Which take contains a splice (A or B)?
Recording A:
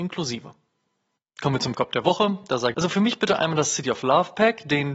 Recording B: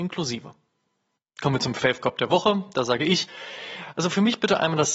A